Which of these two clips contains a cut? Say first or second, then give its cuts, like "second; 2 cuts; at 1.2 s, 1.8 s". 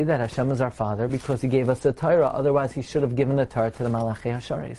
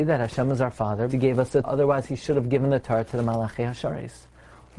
second; 2 cuts; at 1.1 s, 1.6 s